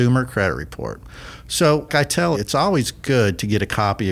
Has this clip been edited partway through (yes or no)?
yes